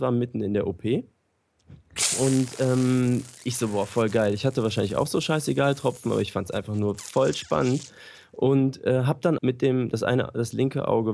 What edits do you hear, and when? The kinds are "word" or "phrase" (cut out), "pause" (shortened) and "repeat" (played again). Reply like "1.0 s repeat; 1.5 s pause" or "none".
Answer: 9.4 s word